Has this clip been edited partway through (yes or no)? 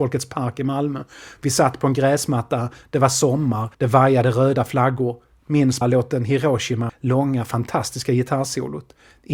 yes